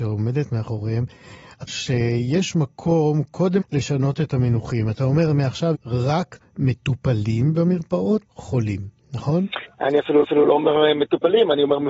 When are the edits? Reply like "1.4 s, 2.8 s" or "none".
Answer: 1.7 s, 3.6 s, 5.7 s, 8.2 s, 9.7 s, 10.2 s